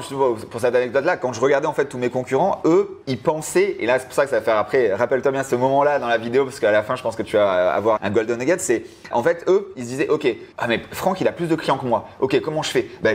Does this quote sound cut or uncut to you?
cut